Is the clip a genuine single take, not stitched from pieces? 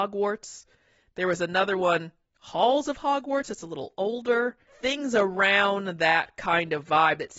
yes; 0 cuts

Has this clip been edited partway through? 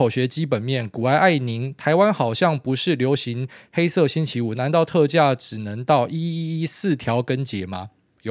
no; 0 cuts

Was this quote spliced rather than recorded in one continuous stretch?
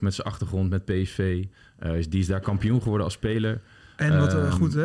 no; 0 cuts

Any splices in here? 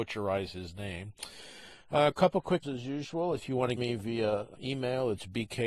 yes; 3 cuts; at 2.6 s, 3.8 s, 4.6 s

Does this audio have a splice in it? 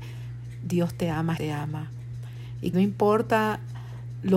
yes; 2 cuts; at 1.4 s, 2.7 s

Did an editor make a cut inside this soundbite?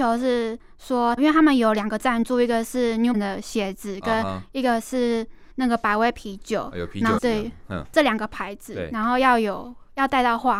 yes; 4 cuts; at 1.2 s, 3.1 s, 5.5 s, 7.2 s

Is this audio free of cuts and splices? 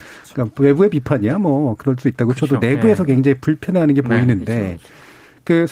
yes; 0 cuts

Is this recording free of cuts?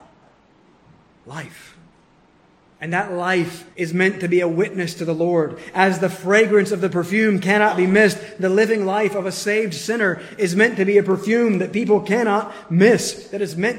no; 1 cut; at 3.7 s

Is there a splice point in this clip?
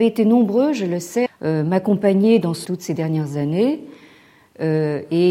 yes; 2 cuts; at 1.3 s, 2.6 s

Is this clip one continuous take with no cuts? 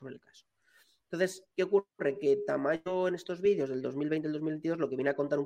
no; 1 cut; at 1.5 s

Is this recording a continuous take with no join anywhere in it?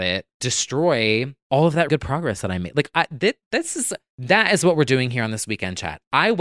no; 1 cut; at 1.9 s

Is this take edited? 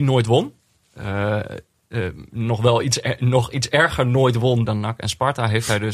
yes; 1 cut; at 4.7 s

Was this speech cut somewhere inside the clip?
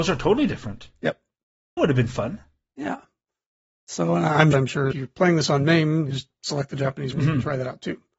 yes; 5 cuts; at 1.8 s, 4.5 s, 4.9 s, 6.1 s, 7.1 s

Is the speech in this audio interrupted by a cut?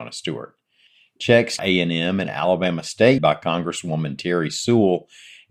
yes; 2 cuts; at 1.6 s, 3.2 s

